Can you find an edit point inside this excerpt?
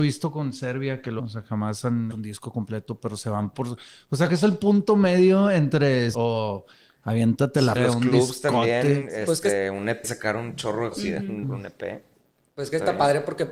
yes; 8 cuts; at 1.2 s, 2.1 s, 4.3 s, 6.1 s, 7.8 s, 10.0 s, 10.9 s, 11.4 s

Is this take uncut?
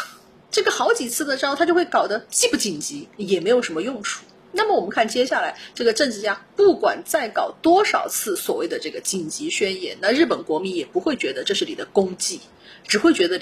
yes; 0 cuts

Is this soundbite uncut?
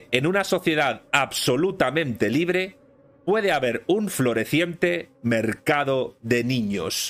yes; 0 cuts

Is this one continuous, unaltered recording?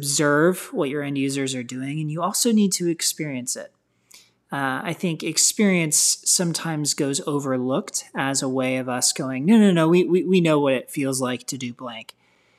yes; 0 cuts

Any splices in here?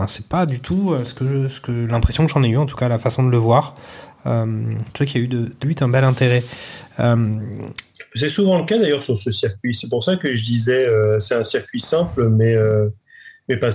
yes; 1 cut; at 5.6 s

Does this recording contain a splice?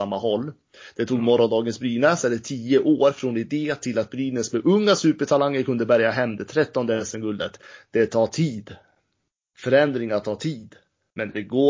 no; 0 cuts

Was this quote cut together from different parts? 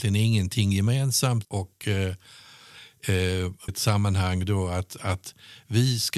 yes; 2 cuts; at 1.4 s, 3.7 s

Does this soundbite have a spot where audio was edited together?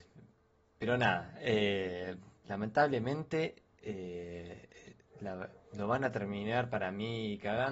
no; 0 cuts

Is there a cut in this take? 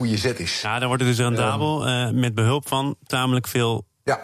no; 0 cuts

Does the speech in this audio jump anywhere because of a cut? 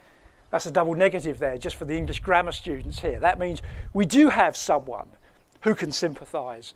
no; 0 cuts

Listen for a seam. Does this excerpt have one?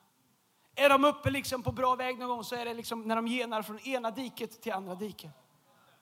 no; 0 cuts

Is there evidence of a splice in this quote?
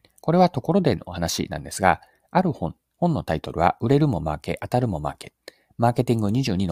no; 0 cuts

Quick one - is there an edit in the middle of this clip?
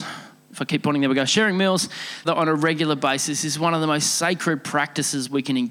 yes; 1 cut; at 2.2 s

